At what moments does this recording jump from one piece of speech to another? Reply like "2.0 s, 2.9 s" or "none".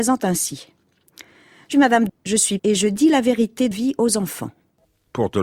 1.7 s, 2.1 s, 2.6 s, 3.7 s